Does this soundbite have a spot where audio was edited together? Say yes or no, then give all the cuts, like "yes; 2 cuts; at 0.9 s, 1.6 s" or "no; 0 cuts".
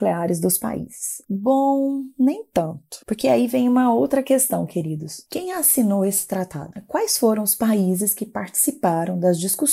no; 0 cuts